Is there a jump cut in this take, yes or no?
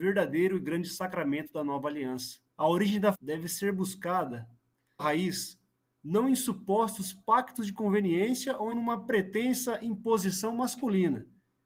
yes